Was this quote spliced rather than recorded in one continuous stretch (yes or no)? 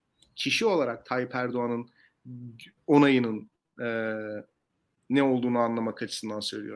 no